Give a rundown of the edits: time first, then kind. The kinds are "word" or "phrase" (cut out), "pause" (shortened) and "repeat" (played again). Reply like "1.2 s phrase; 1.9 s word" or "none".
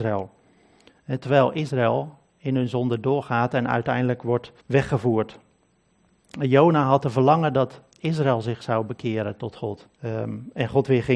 4.6 s pause; 9.9 s pause